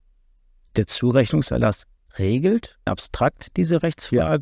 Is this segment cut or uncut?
cut